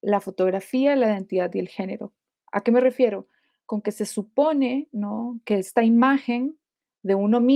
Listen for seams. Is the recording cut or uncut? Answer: uncut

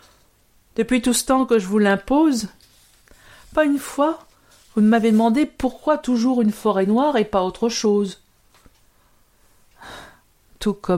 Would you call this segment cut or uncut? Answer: uncut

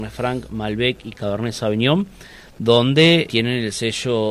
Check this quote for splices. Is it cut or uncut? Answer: cut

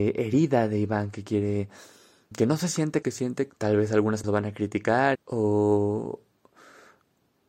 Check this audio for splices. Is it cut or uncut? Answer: cut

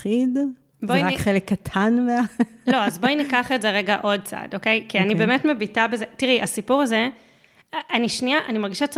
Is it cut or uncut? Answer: uncut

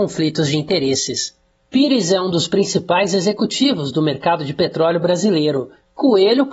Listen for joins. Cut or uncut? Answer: uncut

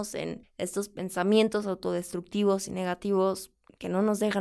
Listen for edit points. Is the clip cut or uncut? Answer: uncut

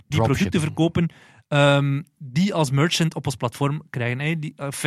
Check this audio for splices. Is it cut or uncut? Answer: uncut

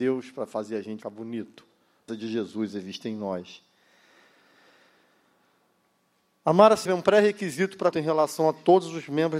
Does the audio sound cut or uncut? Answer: cut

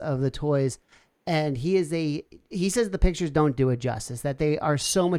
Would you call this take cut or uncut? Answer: uncut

